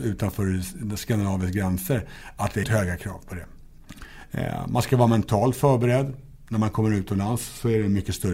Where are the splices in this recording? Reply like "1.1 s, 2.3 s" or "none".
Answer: 2.6 s